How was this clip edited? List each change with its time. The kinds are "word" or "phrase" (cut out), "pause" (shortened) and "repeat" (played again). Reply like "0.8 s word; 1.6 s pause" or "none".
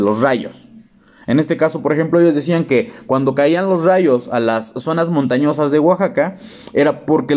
none

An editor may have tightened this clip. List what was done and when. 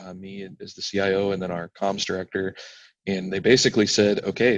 none

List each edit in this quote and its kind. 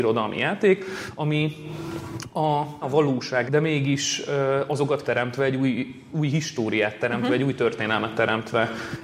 2.8 s phrase; 3.5 s phrase; 5.0 s phrase

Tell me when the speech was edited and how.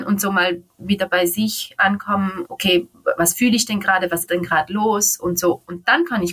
2.4 s word; 4.3 s word

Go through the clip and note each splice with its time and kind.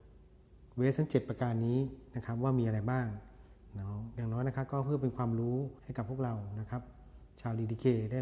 5.8 s pause

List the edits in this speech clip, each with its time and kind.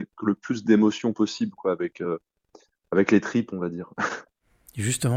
none

